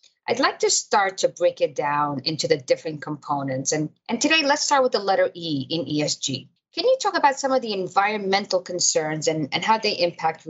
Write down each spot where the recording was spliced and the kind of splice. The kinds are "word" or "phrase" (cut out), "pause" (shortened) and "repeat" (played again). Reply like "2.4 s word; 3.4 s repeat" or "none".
none